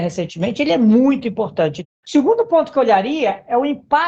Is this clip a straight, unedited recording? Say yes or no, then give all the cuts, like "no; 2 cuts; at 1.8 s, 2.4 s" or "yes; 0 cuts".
yes; 0 cuts